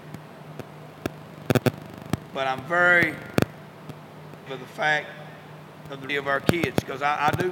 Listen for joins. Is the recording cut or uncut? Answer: cut